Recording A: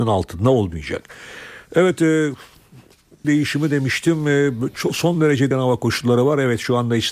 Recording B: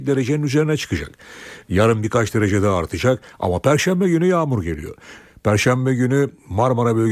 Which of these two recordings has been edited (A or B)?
A